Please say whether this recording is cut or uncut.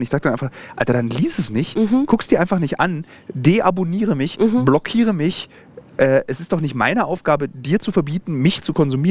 uncut